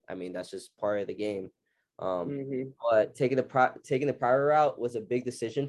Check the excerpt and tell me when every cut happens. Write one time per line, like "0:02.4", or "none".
none